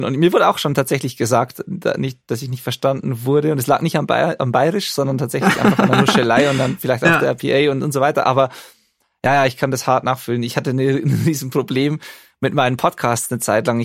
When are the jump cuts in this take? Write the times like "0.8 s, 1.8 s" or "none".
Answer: none